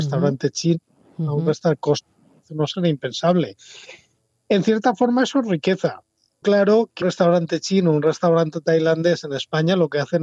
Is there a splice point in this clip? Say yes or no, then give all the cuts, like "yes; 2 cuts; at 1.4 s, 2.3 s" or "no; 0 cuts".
yes; 3 cuts; at 2.7 s, 6.4 s, 7.0 s